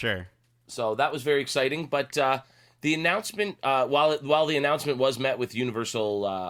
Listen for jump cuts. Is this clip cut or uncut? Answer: uncut